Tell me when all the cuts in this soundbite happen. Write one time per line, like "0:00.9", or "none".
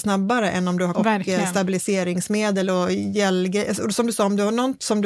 0:00.9